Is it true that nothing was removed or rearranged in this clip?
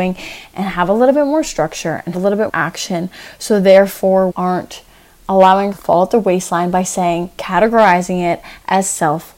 no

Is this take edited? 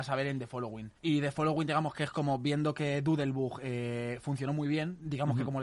yes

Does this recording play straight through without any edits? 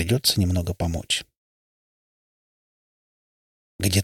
yes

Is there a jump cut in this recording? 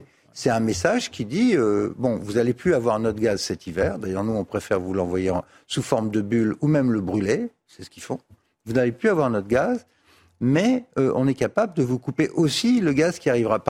no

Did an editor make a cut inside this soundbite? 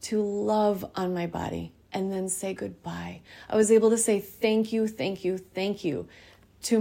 no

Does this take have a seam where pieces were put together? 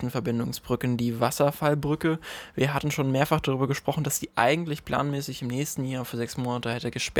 no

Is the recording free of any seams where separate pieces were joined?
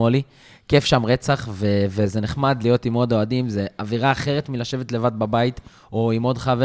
yes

